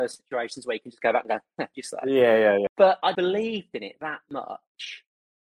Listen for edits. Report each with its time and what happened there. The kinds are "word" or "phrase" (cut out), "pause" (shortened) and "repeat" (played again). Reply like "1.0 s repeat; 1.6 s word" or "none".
1.7 s word; 3.1 s word

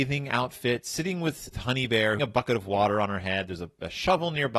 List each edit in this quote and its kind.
1.5 s word; 2.2 s phrase

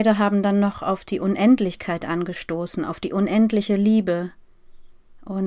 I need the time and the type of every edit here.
none

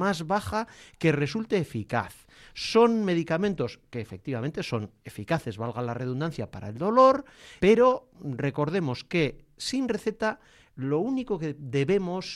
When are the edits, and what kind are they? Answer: 7.6 s word

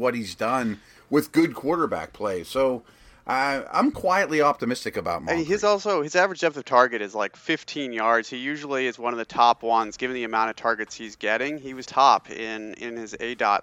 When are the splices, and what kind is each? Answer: 11.8 s word

